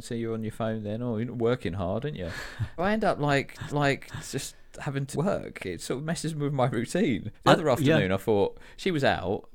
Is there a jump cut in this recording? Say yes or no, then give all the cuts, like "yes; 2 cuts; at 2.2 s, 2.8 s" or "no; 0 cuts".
yes; 4 cuts; at 2.8 s, 3.7 s, 5.1 s, 7.3 s